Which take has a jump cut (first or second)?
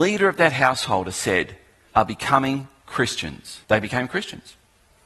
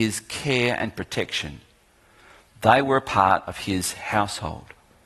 first